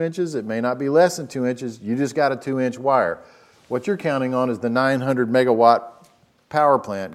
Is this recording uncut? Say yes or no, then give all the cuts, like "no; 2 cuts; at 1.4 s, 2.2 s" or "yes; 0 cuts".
yes; 0 cuts